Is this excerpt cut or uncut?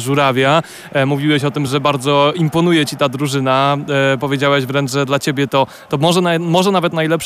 uncut